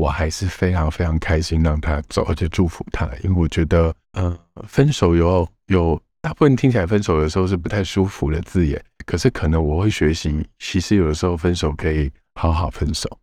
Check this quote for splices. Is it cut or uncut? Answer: cut